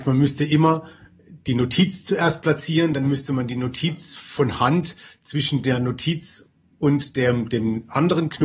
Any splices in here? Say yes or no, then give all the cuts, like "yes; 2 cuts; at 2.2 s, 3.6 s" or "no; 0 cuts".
no; 0 cuts